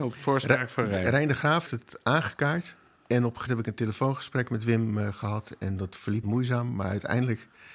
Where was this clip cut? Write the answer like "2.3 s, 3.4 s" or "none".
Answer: 1.7 s, 3.5 s, 6.2 s

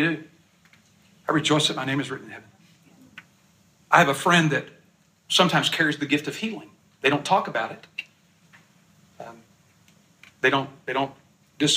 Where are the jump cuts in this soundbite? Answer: none

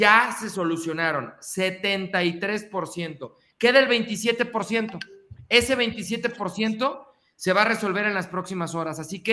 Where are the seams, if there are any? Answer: none

